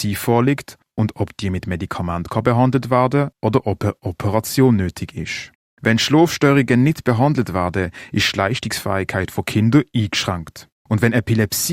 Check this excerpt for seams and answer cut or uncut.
cut